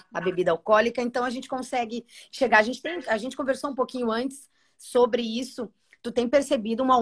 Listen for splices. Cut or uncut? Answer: uncut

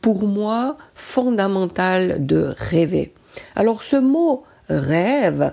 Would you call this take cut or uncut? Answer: uncut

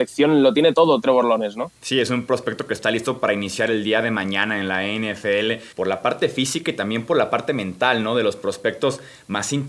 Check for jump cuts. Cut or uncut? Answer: cut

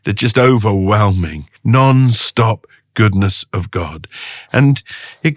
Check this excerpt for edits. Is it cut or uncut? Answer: cut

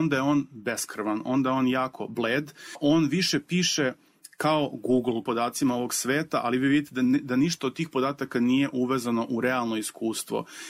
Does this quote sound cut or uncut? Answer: cut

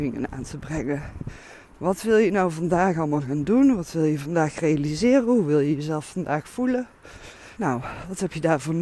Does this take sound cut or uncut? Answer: cut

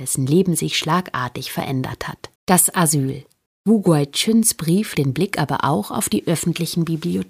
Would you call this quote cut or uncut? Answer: cut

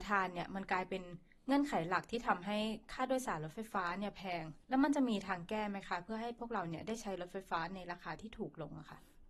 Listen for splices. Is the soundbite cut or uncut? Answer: cut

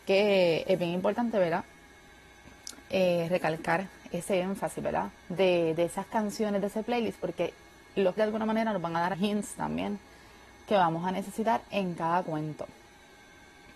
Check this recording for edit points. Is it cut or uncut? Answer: cut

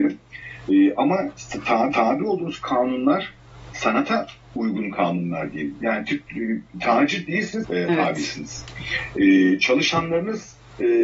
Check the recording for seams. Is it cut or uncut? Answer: cut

